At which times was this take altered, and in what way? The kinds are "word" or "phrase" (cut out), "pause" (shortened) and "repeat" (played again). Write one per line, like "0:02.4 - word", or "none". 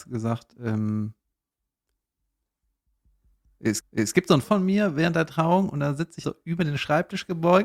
0:03.8 - repeat
0:04.4 - word
0:06.2 - word